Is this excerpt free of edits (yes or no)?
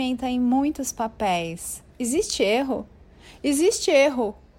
no